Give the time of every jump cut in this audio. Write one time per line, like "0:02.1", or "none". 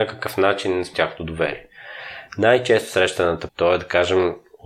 0:00.9
0:03.5